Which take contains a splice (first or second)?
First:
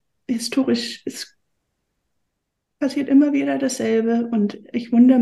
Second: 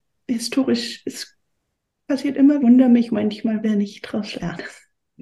second